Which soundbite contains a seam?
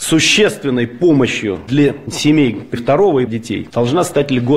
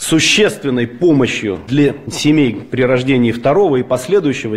first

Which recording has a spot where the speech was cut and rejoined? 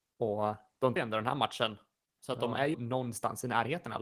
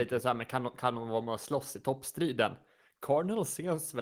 first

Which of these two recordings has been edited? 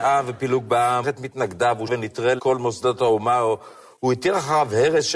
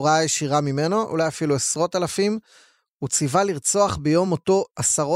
first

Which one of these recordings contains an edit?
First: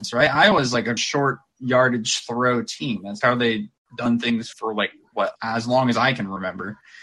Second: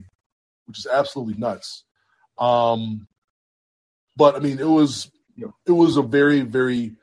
first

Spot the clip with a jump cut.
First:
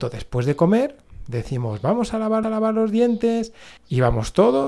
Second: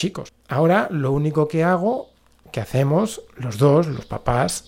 first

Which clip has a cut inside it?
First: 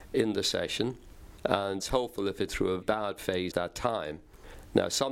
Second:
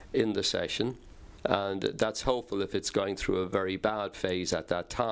first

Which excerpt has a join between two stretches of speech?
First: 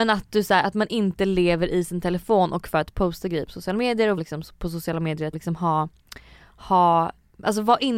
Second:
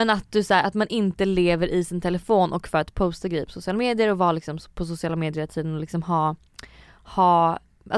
first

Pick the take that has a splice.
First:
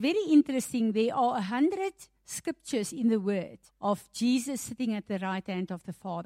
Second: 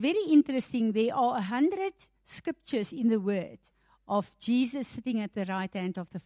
first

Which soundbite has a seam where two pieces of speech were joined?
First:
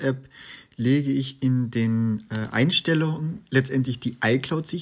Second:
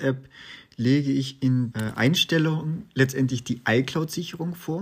second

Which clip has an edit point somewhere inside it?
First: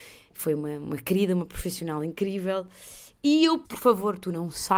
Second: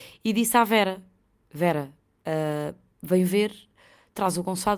first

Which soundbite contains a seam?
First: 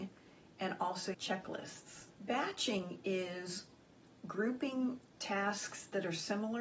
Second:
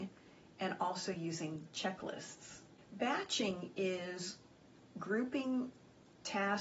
first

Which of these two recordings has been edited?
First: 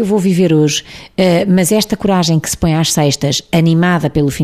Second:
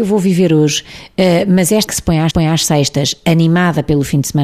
second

